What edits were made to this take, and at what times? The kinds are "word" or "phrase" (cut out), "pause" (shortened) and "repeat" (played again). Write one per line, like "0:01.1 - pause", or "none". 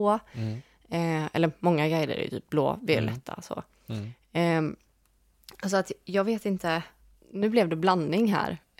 none